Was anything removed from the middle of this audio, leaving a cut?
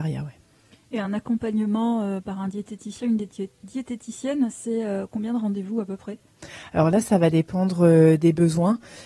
no; 0 cuts

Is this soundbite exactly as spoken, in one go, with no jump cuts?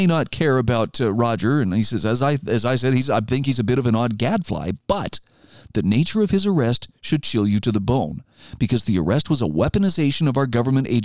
yes; 0 cuts

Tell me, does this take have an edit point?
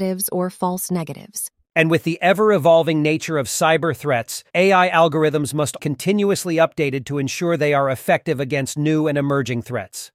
yes; 2 cuts; at 4.5 s, 5.8 s

